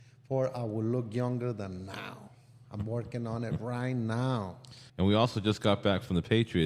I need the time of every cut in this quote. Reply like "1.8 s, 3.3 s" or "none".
4.9 s